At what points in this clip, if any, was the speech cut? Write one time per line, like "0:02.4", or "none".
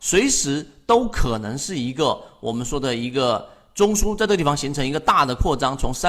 none